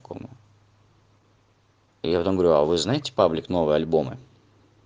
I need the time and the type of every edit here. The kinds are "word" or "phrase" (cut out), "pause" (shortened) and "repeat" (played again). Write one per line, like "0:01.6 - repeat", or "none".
none

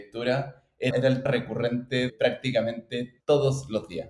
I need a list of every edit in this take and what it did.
0:00.9 - phrase
0:01.3 - word
0:02.1 - word
0:03.2 - word

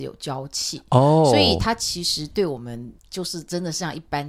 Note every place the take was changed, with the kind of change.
0:03.0 - pause

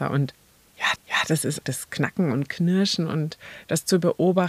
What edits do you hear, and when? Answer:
0:01.0 - repeat
0:01.6 - word

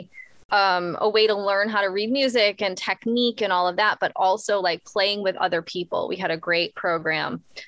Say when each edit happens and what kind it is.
none

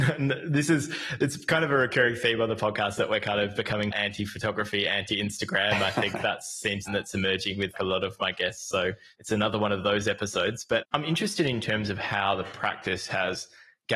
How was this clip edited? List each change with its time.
0:03.9 - word
0:06.9 - phrase
0:07.7 - word
0:10.8 - word

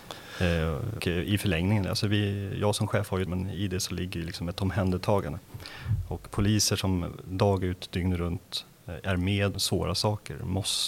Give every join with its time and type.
0:01.0 - word
0:03.3 - word
0:09.5 - word

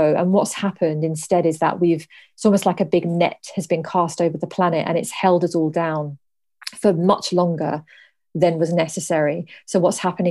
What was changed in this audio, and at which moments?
none

